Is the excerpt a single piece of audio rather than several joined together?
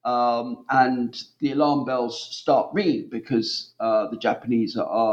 yes; 0 cuts

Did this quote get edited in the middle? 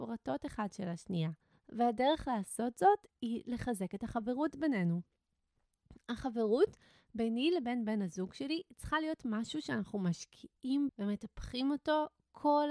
yes; 1 cut; at 10.9 s

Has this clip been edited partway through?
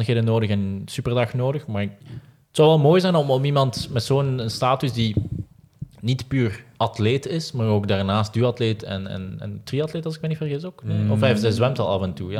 no; 0 cuts

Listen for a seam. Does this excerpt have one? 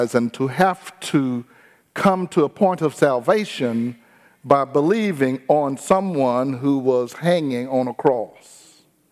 no; 0 cuts

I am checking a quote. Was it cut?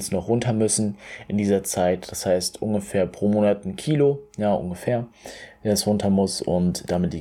no; 0 cuts

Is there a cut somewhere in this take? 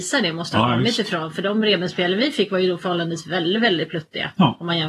no; 0 cuts

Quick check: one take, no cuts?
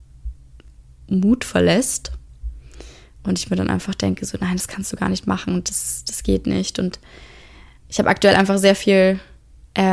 yes; 0 cuts

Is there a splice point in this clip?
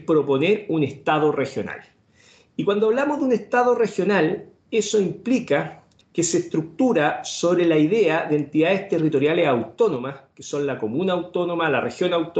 no; 0 cuts

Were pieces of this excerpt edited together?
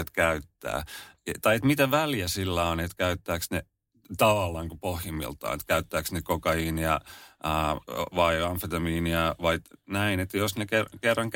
no; 0 cuts

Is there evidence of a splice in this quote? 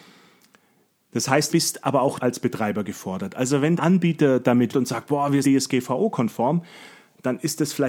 yes; 5 cuts; at 1.5 s, 2.2 s, 3.8 s, 4.7 s, 5.4 s

